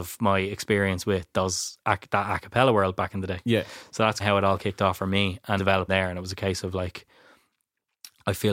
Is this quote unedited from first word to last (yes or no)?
no